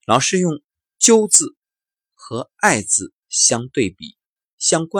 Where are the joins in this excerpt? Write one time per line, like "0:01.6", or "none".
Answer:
0:03.2